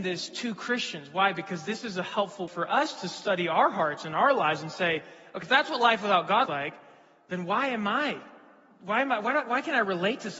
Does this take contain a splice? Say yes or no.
yes